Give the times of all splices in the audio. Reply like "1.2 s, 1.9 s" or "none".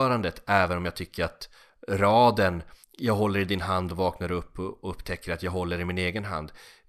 2.8 s